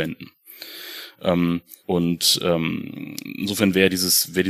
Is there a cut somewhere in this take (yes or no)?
yes